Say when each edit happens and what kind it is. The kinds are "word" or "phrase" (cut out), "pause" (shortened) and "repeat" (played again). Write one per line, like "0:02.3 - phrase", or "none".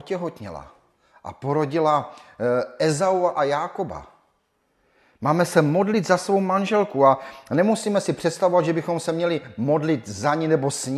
none

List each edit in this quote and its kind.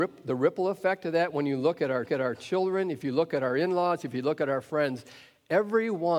0:02.0 - repeat

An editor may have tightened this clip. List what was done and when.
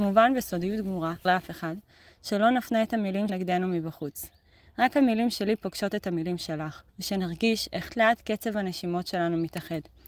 0:01.2 - phrase
0:03.3 - word
0:06.9 - pause
0:07.9 - word

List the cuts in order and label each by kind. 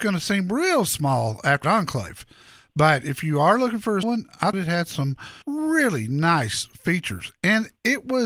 0:01.6 - word
0:04.0 - word
0:04.5 - word
0:05.4 - pause

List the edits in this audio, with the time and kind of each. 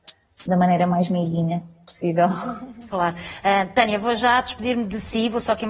none

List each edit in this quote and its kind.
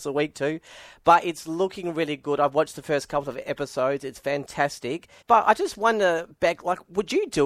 0:05.2 - pause

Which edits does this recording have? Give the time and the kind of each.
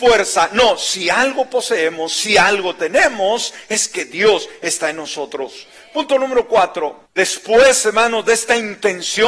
0:07.1 - pause

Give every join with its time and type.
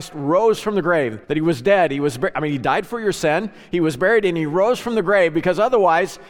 0:01.2 - pause

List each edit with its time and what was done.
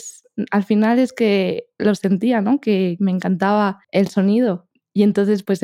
0:03.8 - pause

